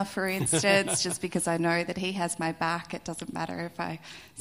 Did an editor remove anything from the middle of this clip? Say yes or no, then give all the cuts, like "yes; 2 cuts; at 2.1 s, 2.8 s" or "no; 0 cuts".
no; 0 cuts